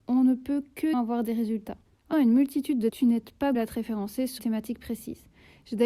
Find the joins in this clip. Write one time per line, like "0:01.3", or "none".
0:00.9
0:02.1
0:02.9
0:03.5
0:04.4